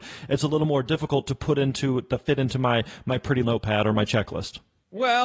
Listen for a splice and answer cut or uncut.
cut